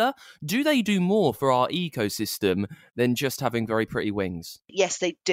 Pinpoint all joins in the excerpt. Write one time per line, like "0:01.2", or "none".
none